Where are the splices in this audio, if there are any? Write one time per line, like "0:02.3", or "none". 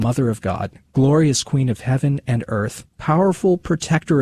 0:02.9